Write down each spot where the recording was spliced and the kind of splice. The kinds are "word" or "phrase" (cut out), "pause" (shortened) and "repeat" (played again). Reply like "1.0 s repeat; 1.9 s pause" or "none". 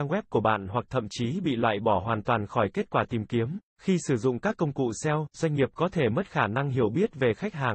3.6 s pause